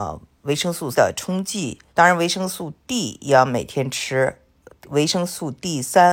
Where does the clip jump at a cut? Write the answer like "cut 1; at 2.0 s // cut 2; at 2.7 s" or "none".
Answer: cut 1; at 0.9 s // cut 2; at 1.9 s